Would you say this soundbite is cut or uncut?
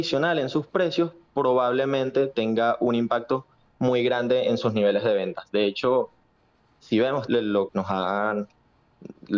cut